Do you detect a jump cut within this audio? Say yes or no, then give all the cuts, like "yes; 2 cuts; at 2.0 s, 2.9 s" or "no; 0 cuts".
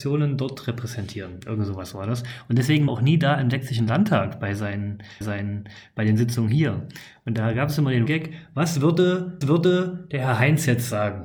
yes; 4 cuts; at 2.9 s, 5.2 s, 8.1 s, 9.4 s